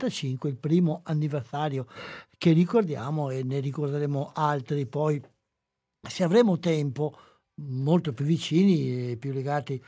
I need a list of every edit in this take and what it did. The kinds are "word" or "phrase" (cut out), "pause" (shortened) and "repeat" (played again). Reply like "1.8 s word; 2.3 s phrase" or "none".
none